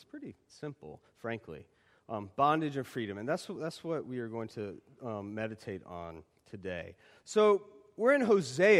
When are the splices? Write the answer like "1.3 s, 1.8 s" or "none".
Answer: none